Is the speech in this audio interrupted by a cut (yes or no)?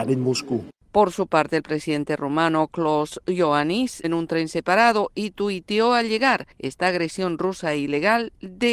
yes